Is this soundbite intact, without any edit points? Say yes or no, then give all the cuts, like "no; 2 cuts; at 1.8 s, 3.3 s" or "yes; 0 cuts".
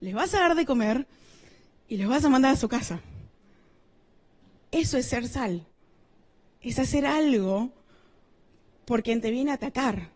yes; 0 cuts